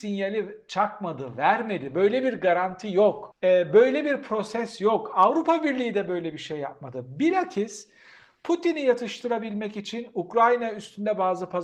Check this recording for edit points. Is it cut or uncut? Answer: uncut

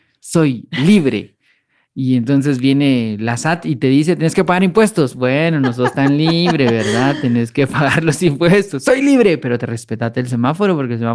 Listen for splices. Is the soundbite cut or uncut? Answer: uncut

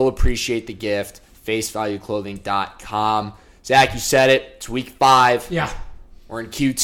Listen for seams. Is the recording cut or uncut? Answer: uncut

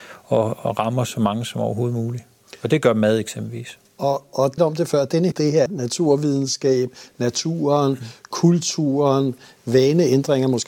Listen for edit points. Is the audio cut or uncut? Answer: cut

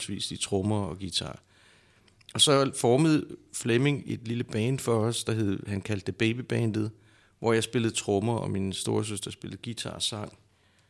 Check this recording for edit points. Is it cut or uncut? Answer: uncut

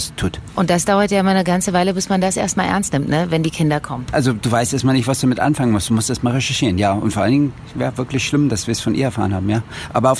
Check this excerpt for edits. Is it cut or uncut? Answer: uncut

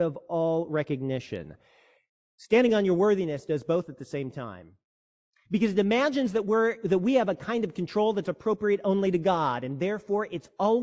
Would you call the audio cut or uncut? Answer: uncut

